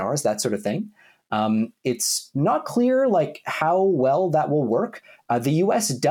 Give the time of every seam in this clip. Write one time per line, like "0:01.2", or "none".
none